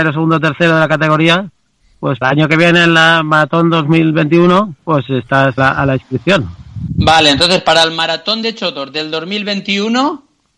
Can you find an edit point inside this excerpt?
yes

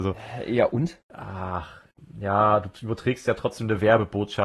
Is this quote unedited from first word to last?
no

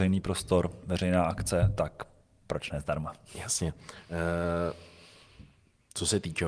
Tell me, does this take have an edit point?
no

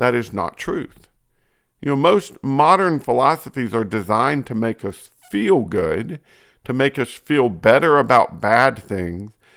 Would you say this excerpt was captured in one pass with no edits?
yes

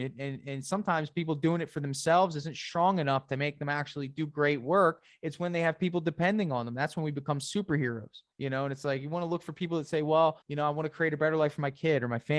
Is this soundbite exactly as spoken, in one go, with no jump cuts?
no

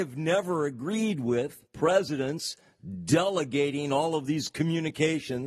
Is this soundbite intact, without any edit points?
no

